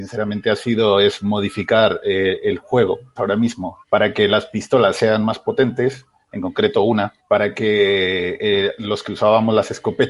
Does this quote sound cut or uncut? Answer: cut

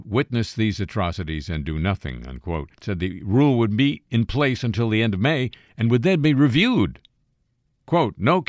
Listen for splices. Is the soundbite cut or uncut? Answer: cut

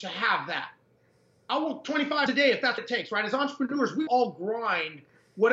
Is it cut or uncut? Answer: cut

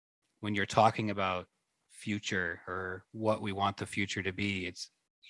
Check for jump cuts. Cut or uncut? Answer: uncut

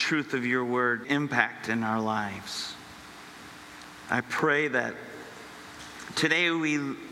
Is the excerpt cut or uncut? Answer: cut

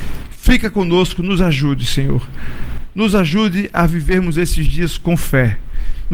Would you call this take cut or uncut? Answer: uncut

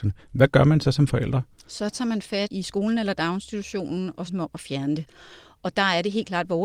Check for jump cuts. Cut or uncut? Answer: cut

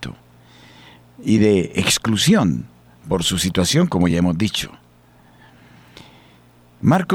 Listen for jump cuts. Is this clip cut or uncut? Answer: uncut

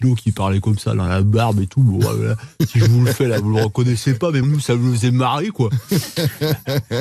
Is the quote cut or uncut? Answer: cut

